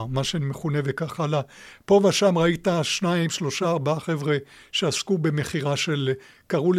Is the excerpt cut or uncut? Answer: uncut